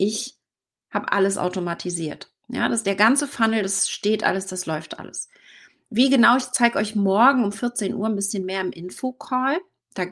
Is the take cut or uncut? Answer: uncut